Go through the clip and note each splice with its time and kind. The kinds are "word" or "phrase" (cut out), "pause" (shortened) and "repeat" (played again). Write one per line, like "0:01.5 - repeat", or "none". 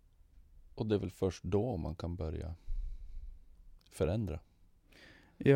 0:03.8 - pause